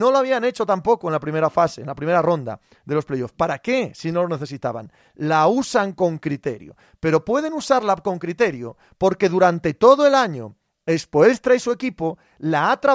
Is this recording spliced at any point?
no; 0 cuts

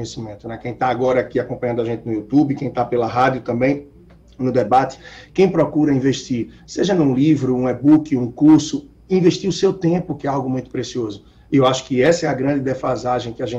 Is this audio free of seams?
yes; 0 cuts

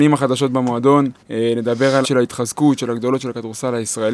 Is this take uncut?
no; 2 cuts; at 1.2 s, 2.0 s

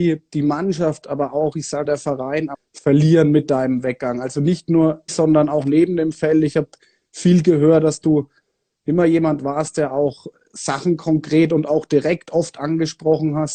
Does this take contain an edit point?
yes; 3 cuts; at 1.9 s, 2.5 s, 5.1 s

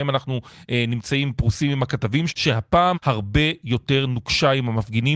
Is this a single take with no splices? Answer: no; 2 cuts; at 2.3 s, 2.9 s

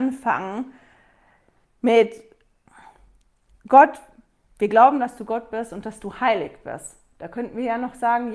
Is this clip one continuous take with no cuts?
yes; 0 cuts

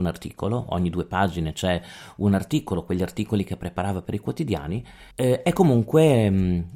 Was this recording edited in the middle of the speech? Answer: yes; 1 cut; at 5.1 s

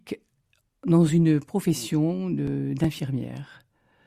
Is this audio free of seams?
yes; 0 cuts

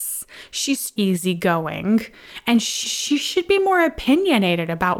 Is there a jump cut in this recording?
yes; 2 cuts; at 1.0 s, 2.8 s

